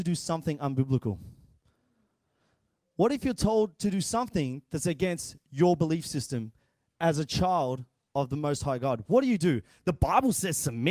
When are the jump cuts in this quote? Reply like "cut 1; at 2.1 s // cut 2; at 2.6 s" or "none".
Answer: none